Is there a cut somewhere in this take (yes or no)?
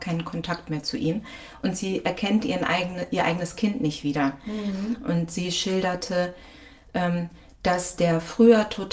no